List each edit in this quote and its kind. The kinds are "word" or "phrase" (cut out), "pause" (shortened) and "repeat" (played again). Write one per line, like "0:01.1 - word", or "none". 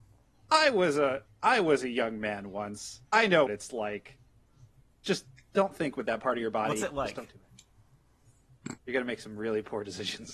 0:03.1 - pause
0:03.5 - word
0:05.5 - word
0:08.8 - pause